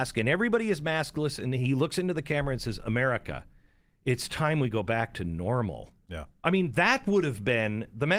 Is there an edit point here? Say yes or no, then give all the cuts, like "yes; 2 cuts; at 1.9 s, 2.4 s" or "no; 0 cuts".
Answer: no; 0 cuts